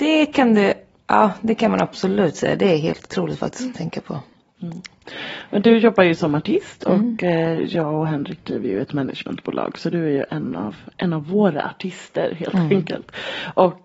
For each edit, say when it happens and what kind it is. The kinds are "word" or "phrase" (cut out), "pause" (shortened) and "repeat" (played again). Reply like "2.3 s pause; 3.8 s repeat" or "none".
none